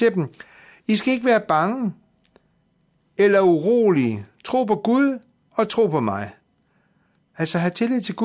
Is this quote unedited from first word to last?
yes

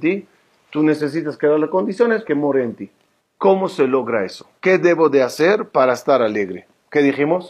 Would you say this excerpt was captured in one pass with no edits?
no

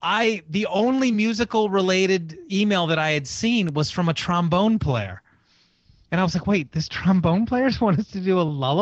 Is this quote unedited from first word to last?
yes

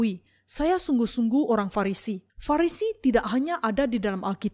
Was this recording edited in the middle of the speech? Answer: yes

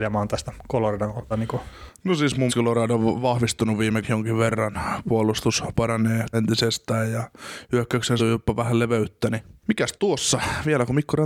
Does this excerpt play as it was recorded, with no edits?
no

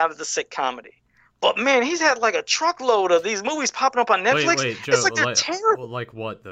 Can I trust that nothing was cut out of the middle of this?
yes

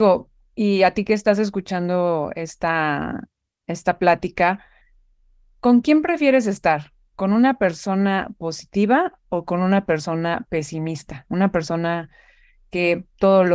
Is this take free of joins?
yes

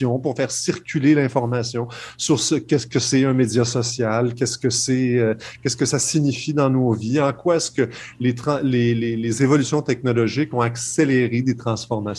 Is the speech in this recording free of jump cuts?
yes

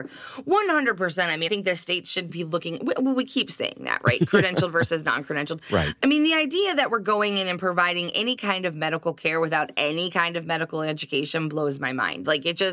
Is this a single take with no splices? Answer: no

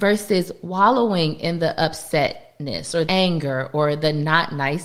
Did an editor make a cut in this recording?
yes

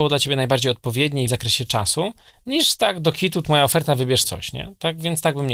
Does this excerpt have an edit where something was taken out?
yes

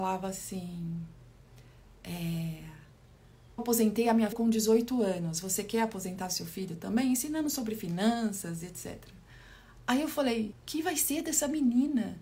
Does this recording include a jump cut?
yes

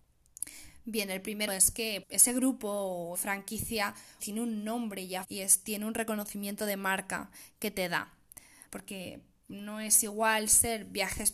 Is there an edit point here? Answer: yes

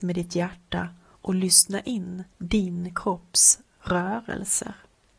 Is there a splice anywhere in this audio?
yes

